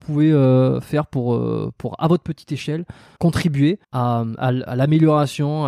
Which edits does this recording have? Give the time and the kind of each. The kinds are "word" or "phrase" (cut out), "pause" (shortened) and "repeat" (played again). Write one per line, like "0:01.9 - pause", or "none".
0:03.2 - word
0:03.8 - pause